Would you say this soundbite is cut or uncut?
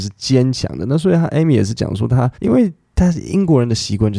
cut